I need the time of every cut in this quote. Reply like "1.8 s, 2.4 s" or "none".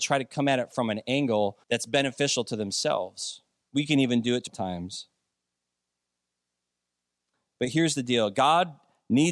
1.6 s, 4.5 s